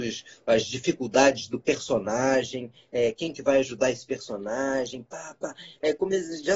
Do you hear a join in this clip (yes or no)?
no